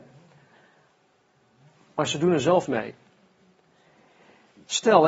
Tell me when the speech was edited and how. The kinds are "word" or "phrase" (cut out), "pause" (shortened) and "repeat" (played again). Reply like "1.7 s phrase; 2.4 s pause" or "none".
2.7 s word